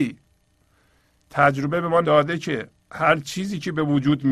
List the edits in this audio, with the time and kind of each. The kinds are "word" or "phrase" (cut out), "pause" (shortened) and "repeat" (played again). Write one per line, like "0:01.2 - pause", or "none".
0:02.0 - word